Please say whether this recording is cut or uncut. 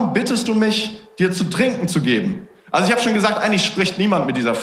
uncut